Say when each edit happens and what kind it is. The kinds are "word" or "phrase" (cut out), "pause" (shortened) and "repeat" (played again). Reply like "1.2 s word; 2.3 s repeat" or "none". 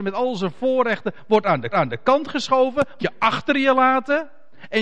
1.7 s repeat; 3.0 s word